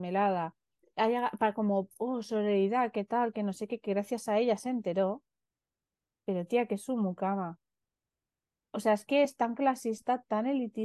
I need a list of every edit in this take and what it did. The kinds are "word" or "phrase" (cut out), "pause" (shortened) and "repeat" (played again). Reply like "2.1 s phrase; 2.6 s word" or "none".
none